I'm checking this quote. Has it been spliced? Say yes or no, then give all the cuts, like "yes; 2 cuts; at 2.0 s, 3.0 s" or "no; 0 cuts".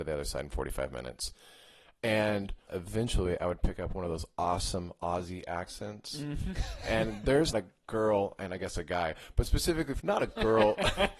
yes; 3 cuts; at 2.7 s, 7.5 s, 10.0 s